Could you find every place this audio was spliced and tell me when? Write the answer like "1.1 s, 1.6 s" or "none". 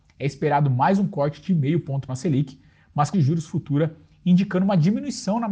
2.1 s, 3.1 s